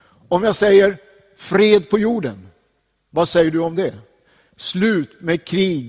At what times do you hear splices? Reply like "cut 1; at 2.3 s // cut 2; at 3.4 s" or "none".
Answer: none